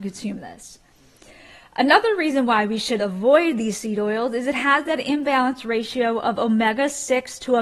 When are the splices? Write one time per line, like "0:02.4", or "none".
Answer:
none